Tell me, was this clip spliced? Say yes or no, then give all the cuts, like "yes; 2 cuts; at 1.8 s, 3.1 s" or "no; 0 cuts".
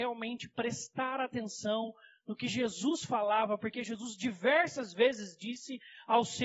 no; 0 cuts